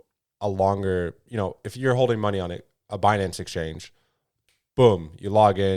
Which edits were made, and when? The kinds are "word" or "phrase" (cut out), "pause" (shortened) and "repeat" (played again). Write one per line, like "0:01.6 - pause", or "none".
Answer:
none